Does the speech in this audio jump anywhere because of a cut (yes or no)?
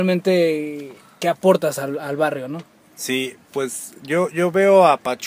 no